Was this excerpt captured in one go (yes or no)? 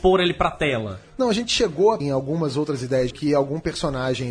no